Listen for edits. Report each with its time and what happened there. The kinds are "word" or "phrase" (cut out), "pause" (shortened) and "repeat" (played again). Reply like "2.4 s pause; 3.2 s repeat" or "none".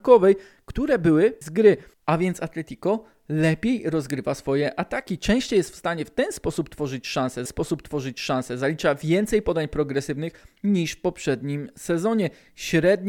1.4 s word; 7.5 s repeat